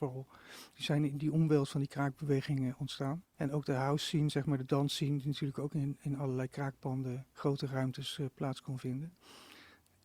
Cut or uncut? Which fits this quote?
cut